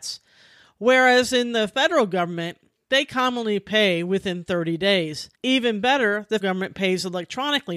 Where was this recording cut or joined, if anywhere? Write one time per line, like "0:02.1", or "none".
0:05.3
0:06.4